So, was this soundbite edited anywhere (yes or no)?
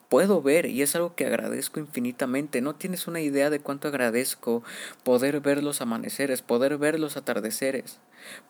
no